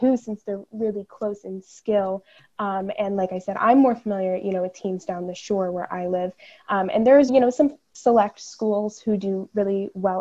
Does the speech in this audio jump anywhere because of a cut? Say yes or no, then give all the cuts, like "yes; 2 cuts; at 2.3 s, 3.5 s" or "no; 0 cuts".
yes; 1 cut; at 7.3 s